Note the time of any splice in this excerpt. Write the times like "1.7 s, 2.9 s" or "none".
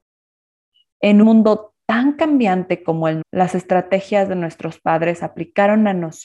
1.2 s, 3.2 s